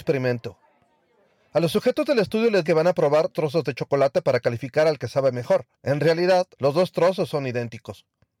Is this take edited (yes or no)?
yes